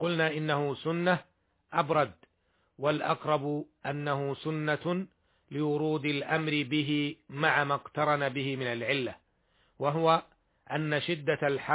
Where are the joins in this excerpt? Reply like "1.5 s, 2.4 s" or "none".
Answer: none